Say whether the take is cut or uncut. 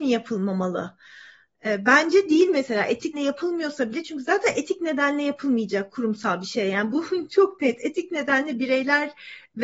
cut